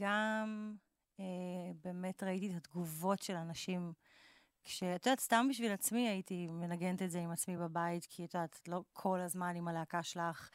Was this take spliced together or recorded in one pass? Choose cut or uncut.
uncut